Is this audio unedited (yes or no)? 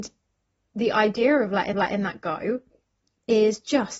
no